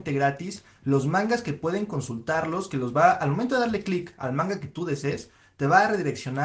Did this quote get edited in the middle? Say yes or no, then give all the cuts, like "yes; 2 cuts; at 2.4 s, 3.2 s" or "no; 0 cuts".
no; 0 cuts